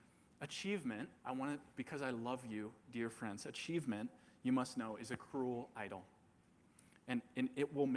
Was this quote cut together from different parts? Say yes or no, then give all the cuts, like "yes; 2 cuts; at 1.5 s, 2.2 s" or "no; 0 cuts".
yes; 1 cut; at 1.2 s